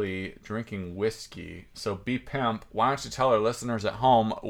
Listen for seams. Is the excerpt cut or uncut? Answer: uncut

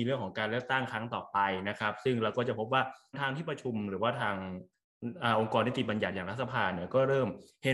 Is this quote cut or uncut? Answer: uncut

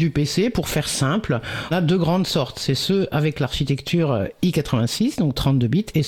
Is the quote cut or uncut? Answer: cut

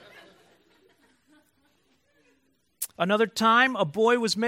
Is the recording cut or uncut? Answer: cut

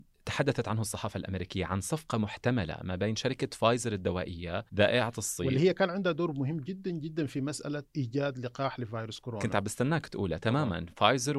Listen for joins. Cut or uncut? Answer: cut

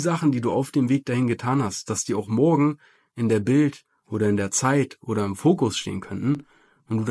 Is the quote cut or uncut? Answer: uncut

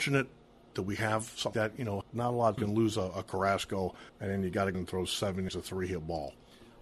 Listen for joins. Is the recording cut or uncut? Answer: cut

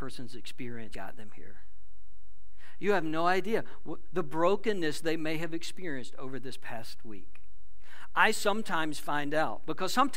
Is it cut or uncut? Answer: cut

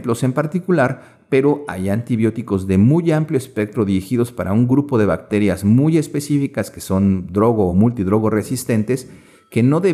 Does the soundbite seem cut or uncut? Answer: uncut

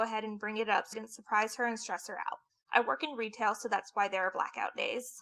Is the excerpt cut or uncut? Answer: cut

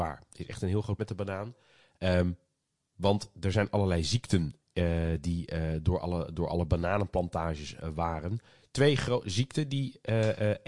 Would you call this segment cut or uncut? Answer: cut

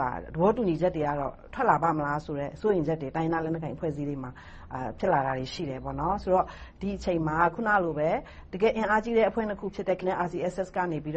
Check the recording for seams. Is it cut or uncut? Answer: cut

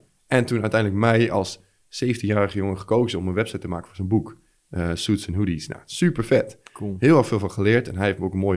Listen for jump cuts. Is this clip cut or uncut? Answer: uncut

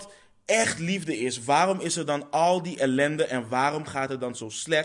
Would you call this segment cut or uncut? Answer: uncut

